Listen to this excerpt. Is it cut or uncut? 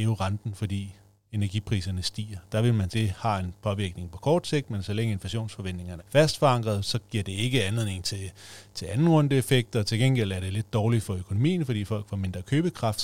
cut